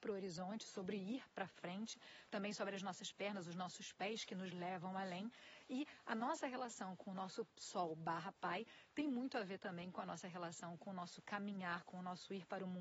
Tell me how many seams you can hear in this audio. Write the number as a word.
zero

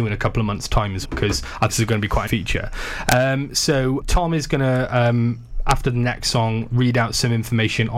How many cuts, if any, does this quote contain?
four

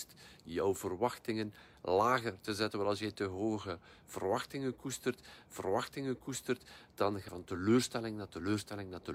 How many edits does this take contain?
two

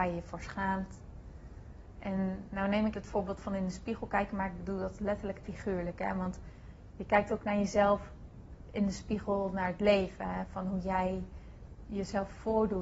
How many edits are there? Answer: two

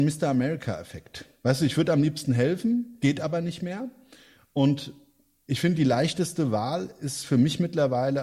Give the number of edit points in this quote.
zero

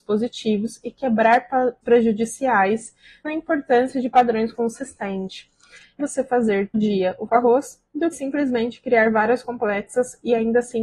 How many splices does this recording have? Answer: eight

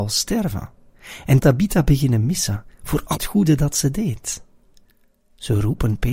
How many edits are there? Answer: two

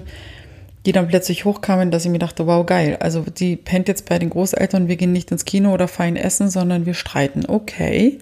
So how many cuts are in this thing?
zero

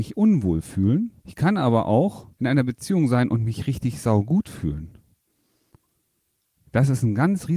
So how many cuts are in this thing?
two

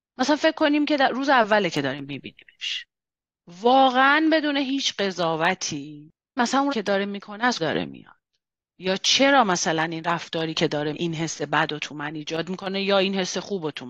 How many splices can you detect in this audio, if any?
four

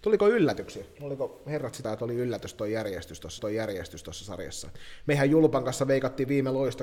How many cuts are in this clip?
two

